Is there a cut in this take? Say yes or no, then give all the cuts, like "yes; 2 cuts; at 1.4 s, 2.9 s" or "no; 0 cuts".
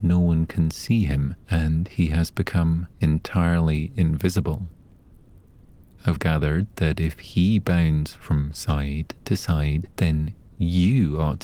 yes; 4 cuts; at 1.4 s, 2.9 s, 6.2 s, 9.9 s